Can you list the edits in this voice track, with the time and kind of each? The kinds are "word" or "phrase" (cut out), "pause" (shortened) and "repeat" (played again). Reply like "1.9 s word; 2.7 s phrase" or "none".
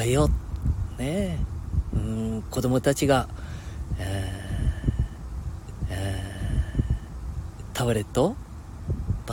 5.8 s repeat